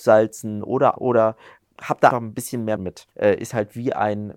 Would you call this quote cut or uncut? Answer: cut